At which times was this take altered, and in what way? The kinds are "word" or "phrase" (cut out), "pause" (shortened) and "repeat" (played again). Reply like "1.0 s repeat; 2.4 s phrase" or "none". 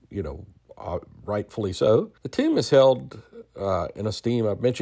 2.2 s pause